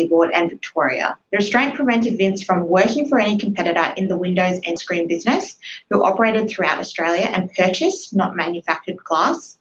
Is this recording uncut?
no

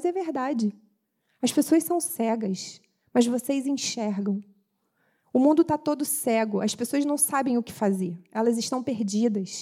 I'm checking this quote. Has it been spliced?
no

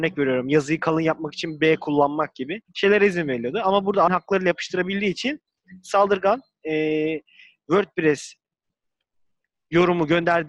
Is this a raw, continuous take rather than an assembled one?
no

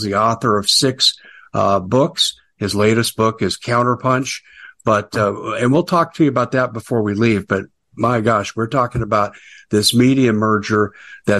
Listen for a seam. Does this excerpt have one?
no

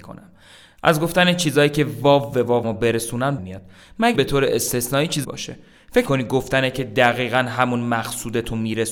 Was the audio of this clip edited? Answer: yes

